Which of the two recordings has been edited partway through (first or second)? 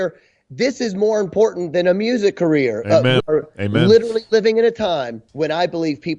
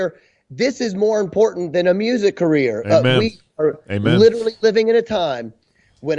first